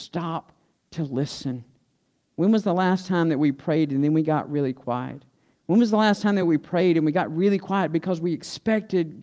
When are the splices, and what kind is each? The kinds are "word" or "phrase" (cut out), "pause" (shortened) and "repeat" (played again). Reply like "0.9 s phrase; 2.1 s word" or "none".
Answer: none

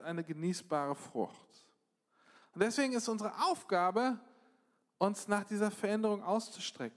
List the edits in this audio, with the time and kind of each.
none

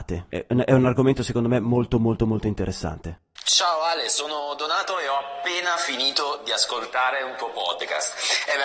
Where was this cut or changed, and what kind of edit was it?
none

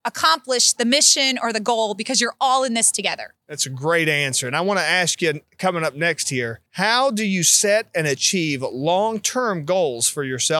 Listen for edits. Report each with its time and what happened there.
3.4 s pause; 6.7 s pause

